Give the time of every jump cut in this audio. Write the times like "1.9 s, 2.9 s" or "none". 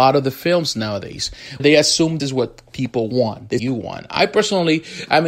1.6 s, 2.2 s, 3.6 s